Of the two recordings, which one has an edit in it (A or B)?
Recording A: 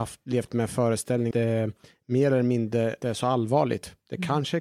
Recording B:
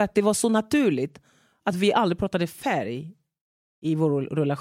A